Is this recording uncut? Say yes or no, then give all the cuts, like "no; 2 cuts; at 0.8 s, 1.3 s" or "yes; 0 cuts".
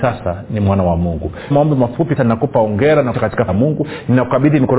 no; 4 cuts; at 1.5 s, 2.2 s, 3.1 s, 3.5 s